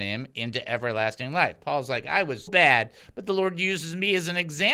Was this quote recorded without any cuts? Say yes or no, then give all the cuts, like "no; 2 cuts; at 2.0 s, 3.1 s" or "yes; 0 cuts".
no; 1 cut; at 2.5 s